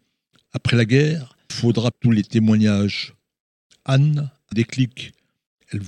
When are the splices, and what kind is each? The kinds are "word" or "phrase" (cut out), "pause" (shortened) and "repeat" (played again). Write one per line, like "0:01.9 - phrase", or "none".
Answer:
0:01.5 - word
0:01.9 - word
0:04.5 - word